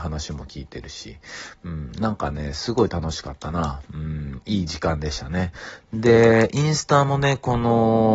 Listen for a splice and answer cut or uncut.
uncut